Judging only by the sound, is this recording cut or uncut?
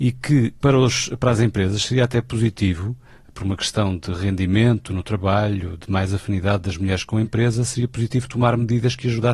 uncut